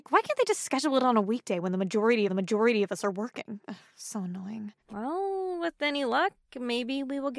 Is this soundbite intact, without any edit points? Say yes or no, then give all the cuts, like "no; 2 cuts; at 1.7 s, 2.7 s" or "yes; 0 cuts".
no; 2 cuts; at 2.3 s, 4.8 s